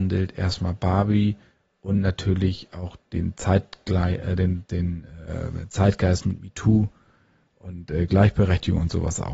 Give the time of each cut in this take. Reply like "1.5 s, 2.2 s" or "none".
none